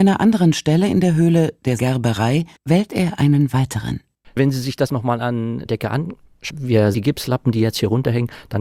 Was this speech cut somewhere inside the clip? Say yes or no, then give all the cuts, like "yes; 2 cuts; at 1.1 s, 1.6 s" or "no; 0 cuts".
yes; 6 cuts; at 1.8 s, 2.6 s, 4.9 s, 5.7 s, 6.5 s, 6.9 s